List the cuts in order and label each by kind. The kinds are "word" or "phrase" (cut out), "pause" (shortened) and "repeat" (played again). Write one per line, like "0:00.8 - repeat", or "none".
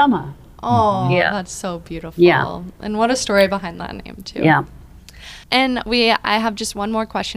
0:05.4 - pause